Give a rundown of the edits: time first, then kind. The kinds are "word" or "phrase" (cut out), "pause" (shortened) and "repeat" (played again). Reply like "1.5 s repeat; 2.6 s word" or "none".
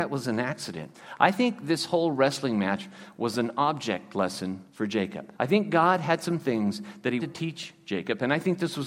4.7 s pause; 5.3 s pause; 7.2 s word